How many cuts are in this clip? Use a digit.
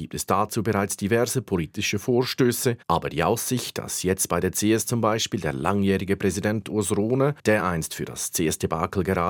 2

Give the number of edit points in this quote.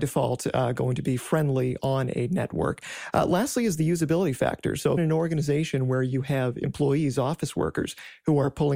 1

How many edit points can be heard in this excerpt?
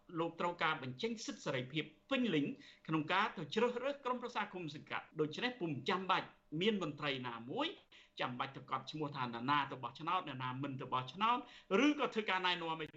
1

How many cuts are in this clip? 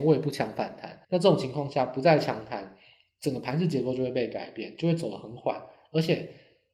1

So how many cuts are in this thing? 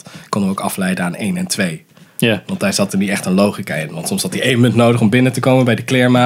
0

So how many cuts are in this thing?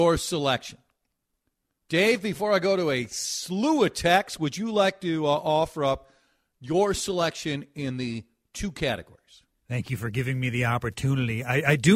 0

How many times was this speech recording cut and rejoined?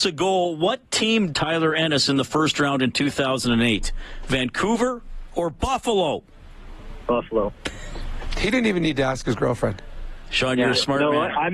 1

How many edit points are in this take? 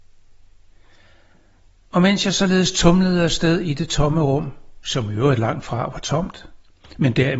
0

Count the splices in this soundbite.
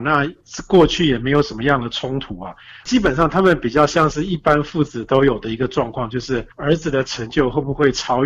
1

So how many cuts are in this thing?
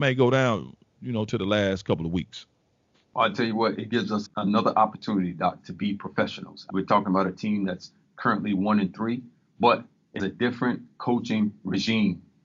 3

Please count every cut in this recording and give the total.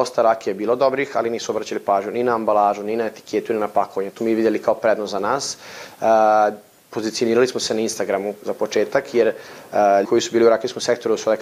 2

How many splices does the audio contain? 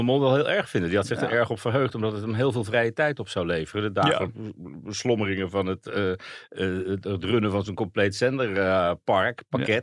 0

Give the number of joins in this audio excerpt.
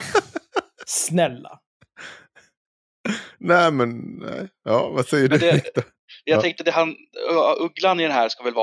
0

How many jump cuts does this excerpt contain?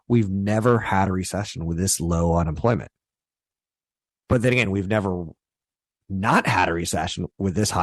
0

